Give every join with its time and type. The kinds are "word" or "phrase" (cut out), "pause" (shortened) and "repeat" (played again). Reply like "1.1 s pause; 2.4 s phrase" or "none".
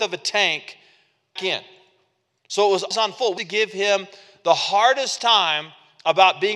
1.4 s word; 2.9 s word; 3.4 s word